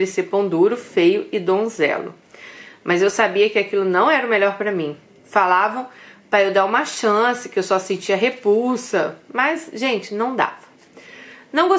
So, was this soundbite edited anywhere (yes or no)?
yes